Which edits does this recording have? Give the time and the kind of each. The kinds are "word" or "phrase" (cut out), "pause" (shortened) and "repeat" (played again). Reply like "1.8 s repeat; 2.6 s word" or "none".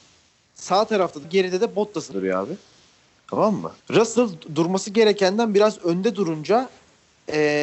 1.2 s phrase; 2.1 s word; 3.8 s pause